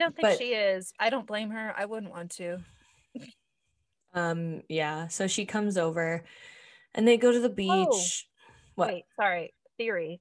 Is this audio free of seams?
yes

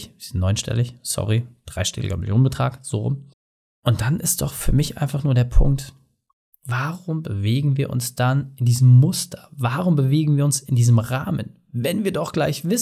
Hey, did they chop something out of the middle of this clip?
no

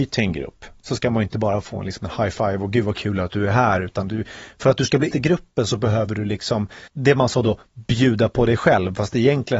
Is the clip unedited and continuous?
no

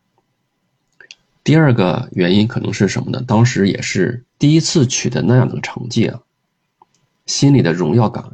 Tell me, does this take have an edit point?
yes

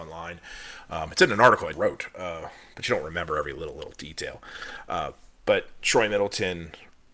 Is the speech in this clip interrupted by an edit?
yes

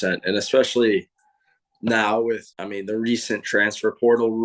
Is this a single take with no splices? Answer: no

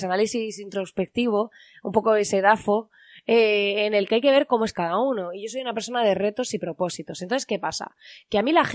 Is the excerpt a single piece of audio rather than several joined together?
yes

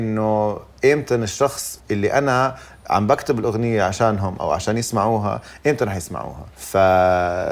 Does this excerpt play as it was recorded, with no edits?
no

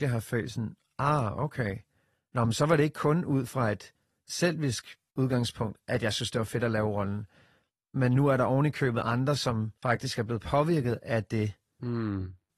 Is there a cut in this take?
no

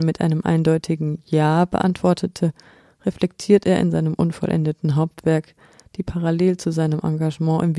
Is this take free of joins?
yes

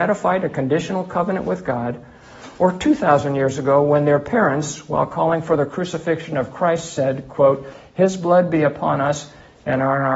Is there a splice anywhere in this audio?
no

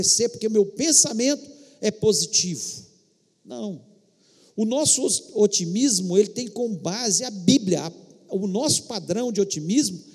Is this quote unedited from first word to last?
yes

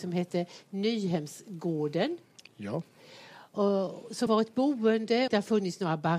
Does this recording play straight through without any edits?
no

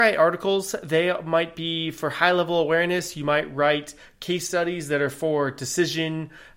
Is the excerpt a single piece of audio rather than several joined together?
yes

